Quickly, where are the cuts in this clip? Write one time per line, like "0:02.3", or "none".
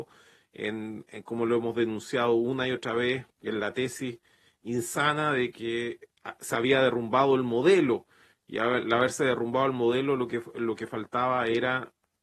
0:03.3